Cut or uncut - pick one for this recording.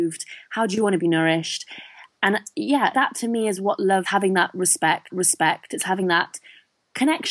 cut